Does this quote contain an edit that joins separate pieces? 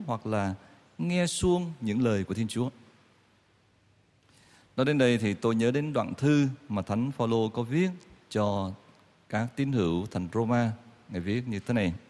no; 0 cuts

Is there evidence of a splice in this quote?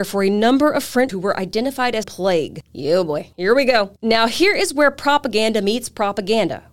yes; 4 cuts; at 1.1 s, 2.0 s, 3.3 s, 4.0 s

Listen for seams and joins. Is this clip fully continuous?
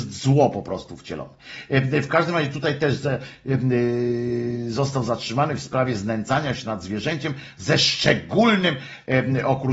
yes; 0 cuts

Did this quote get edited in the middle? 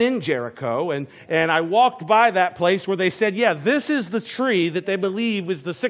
no; 0 cuts

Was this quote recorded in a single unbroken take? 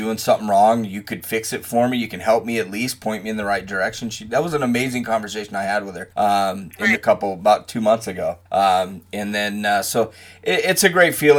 no; 3 cuts; at 6.1 s, 6.9 s, 8.5 s

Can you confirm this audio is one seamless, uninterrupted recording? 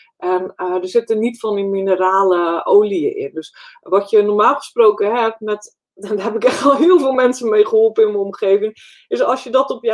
yes; 0 cuts

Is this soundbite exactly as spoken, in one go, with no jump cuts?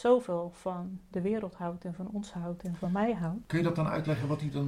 yes; 0 cuts

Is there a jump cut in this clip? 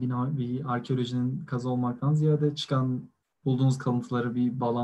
no; 0 cuts

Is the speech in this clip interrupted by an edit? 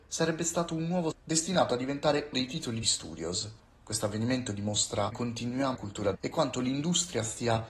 yes; 6 cuts; at 1.1 s, 2.3 s, 2.8 s, 5.1 s, 5.7 s, 6.1 s

